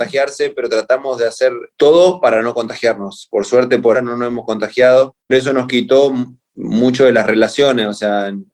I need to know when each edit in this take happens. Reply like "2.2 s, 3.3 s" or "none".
3.9 s, 5.3 s